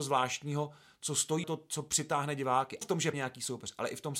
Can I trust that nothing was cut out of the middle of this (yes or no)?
no